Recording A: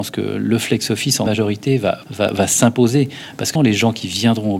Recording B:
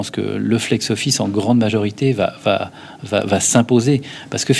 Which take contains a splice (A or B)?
A